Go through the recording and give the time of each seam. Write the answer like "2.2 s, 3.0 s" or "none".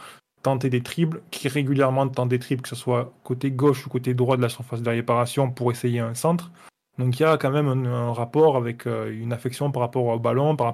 none